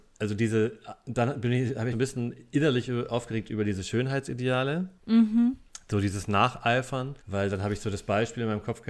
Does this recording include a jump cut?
yes; 3 cuts; at 1.9 s, 5.0 s, 7.2 s

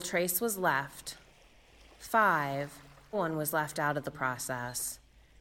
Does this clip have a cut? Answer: yes; 2 cuts; at 3.1 s, 4.1 s

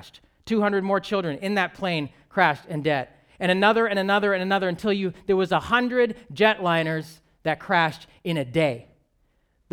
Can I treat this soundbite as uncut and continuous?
yes; 0 cuts

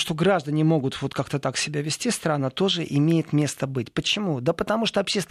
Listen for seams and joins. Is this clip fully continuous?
yes; 0 cuts

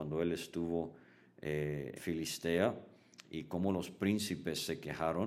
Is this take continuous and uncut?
no; 1 cut; at 2.0 s

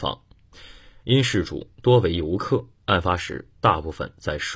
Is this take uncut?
yes; 0 cuts

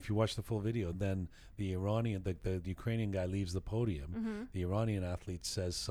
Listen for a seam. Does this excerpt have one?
no; 0 cuts

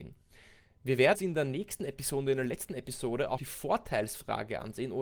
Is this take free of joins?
no; 2 cuts; at 1.1 s, 3.4 s

